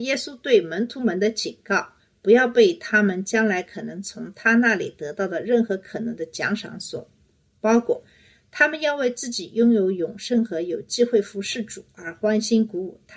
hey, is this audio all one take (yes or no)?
yes